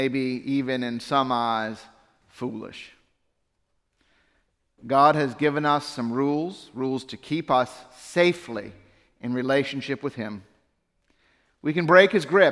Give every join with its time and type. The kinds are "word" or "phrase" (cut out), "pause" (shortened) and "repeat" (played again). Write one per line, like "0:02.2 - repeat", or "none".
none